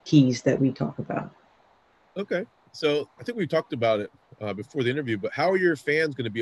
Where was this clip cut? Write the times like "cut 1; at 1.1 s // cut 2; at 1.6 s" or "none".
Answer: cut 1; at 3.2 s

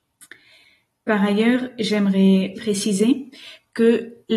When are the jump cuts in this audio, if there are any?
cut 1; at 2.5 s

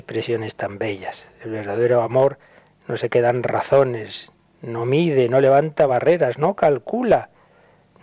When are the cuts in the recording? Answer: none

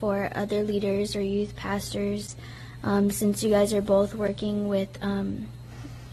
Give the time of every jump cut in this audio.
none

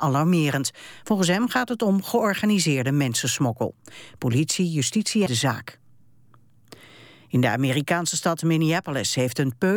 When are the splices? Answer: cut 1; at 5.3 s

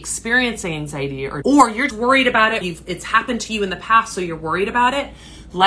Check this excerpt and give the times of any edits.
cut 1; at 1.4 s // cut 2; at 1.9 s // cut 3; at 2.6 s

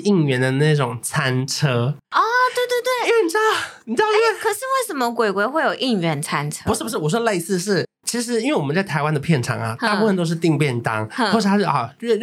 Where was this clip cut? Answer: cut 1; at 2.0 s

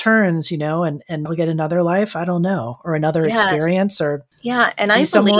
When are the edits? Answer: cut 1; at 1.3 s // cut 2; at 4.3 s

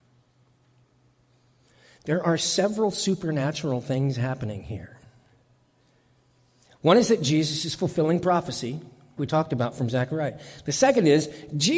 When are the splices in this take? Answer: cut 1; at 9.2 s

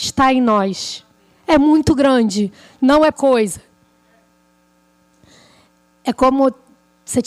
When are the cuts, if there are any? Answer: cut 1; at 3.1 s

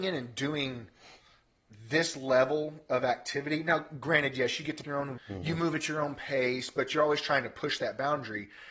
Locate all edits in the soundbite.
cut 1; at 4.8 s // cut 2; at 5.2 s

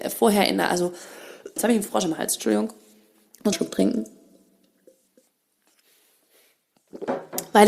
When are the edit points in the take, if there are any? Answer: cut 1; at 1.6 s // cut 2; at 3.5 s

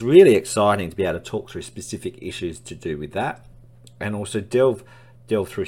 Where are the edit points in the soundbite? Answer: none

